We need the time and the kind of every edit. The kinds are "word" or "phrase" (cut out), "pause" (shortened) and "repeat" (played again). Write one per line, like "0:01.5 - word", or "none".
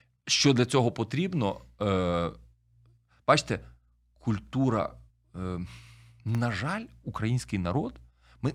none